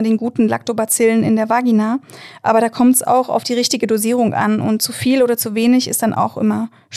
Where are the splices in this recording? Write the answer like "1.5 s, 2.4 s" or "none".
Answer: none